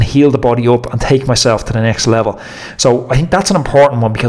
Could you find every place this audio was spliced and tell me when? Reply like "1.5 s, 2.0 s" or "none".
none